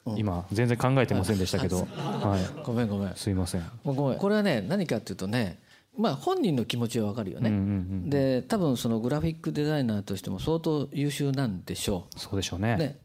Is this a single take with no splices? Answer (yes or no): yes